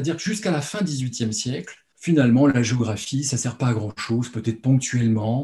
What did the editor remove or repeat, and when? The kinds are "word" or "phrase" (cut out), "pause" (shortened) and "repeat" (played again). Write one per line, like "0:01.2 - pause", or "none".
0:01.9 - pause